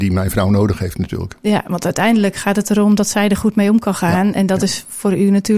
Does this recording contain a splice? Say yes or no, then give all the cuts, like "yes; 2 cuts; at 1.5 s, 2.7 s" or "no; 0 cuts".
no; 0 cuts